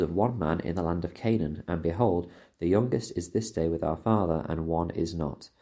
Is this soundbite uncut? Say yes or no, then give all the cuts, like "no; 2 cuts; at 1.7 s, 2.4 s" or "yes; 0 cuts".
yes; 0 cuts